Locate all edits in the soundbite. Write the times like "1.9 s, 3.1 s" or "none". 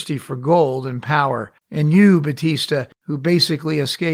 1.6 s, 2.9 s